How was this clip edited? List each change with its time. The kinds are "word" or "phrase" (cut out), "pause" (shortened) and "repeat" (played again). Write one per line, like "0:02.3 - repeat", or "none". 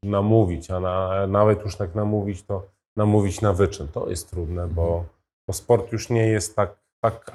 none